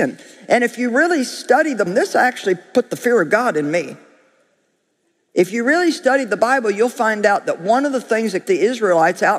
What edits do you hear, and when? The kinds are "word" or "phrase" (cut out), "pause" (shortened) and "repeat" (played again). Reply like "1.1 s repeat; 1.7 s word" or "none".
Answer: 1.9 s word; 8.4 s word